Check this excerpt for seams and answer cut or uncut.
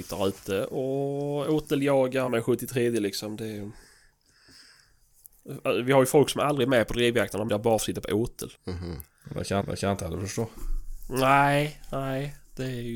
cut